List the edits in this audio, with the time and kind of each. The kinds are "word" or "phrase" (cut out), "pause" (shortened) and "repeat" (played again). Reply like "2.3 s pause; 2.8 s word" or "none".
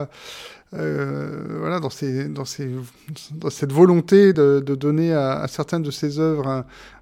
none